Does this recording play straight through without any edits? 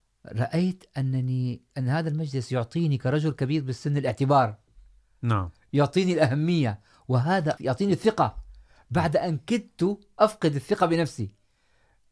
no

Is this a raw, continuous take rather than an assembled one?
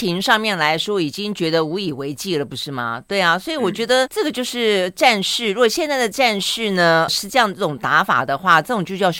no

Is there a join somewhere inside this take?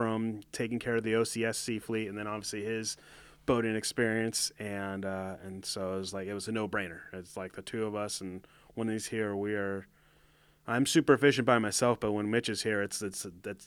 no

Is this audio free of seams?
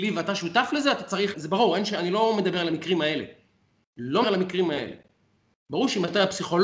no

